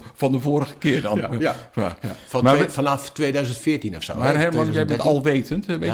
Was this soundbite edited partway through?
no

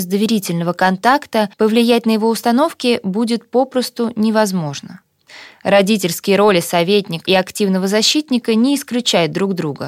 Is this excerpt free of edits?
no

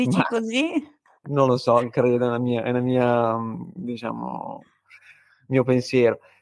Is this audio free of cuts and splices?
yes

